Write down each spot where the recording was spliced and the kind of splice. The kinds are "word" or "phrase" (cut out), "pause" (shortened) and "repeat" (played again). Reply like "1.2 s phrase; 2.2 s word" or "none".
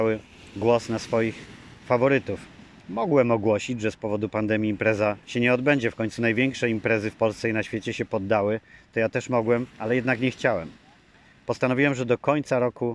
1.8 s pause; 5.2 s pause; 9.7 s pause